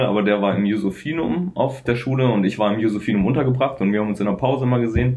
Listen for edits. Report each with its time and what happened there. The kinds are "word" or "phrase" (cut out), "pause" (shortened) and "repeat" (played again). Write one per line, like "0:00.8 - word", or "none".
0:01.9 - word